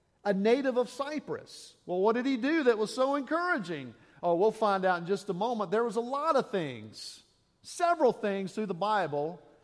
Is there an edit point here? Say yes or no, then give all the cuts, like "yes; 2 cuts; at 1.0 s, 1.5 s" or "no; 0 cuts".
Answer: no; 0 cuts